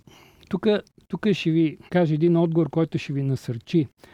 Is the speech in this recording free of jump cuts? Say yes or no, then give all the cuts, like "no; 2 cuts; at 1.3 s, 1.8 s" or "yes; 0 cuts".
no; 1 cut; at 1.9 s